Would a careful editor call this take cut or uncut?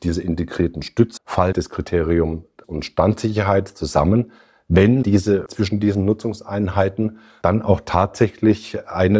cut